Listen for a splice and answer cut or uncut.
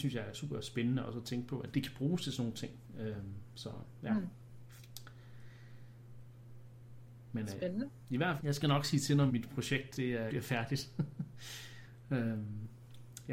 cut